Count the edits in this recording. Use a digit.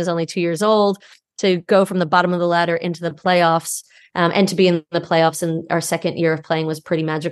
0